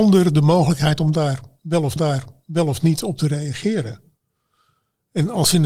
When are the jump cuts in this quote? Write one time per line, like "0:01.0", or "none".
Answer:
0:02.0